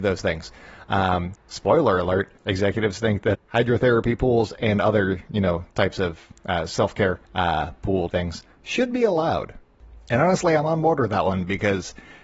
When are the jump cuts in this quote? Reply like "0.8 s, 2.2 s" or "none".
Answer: 1.4 s, 2.4 s, 3.3 s, 5.7 s, 6.4 s, 7.3 s, 8.1 s